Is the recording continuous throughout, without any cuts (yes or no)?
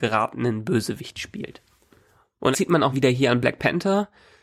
no